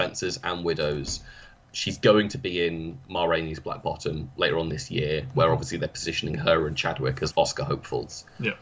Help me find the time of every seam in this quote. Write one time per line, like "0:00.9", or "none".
0:07.3